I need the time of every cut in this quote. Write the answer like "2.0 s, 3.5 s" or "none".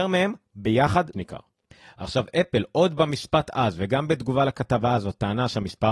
1.1 s, 1.7 s